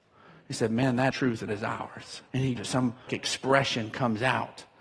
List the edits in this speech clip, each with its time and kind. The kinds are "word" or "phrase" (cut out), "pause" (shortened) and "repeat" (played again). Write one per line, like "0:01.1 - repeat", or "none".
0:01.1 - word
0:01.5 - word
0:02.3 - pause
0:02.6 - word
0:03.1 - word